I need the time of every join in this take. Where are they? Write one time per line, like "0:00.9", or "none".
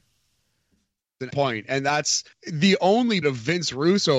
0:01.3
0:02.3
0:03.2